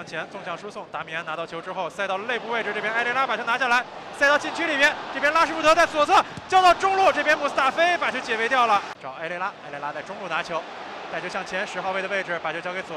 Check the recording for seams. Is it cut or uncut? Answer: uncut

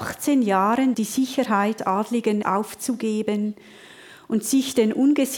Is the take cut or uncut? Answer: cut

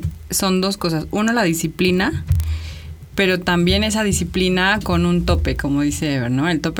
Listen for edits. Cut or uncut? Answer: uncut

